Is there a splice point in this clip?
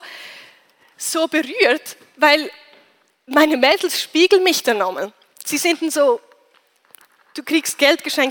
no; 0 cuts

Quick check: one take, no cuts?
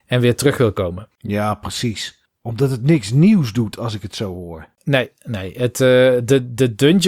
yes; 0 cuts

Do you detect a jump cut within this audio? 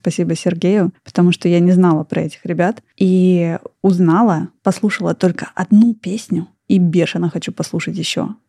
no; 0 cuts

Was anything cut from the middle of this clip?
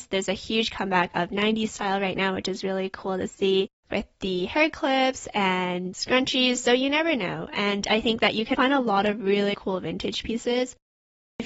yes; 2 cuts; at 8.5 s, 9.5 s

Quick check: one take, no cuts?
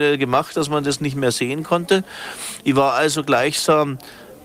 yes; 0 cuts

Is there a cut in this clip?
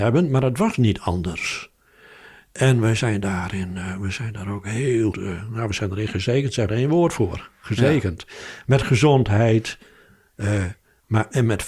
yes; 2 cuts; at 5.1 s, 6.7 s

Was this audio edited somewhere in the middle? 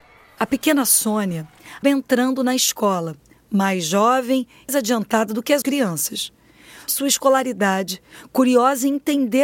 yes; 4 cuts; at 1.8 s, 4.7 s, 5.6 s, 6.9 s

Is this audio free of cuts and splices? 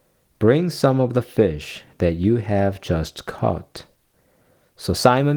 yes; 0 cuts

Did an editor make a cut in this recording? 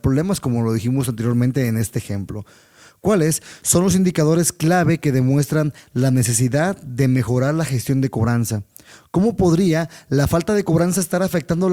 no; 0 cuts

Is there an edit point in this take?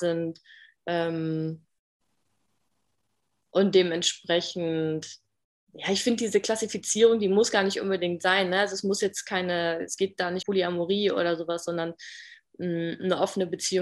yes; 1 cut; at 10.4 s

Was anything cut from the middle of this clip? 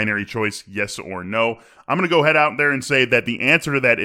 no; 0 cuts

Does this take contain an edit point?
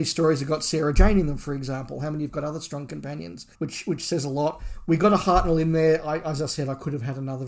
yes; 1 cut; at 3.5 s

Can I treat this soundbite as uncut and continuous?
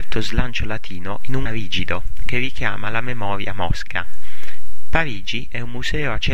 no; 1 cut; at 1.5 s

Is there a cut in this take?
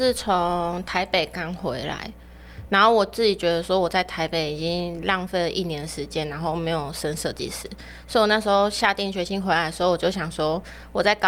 no; 0 cuts

